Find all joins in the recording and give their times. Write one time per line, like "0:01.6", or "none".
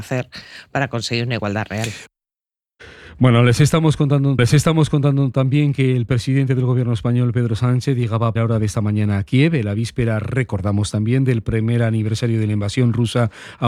0:04.4
0:08.4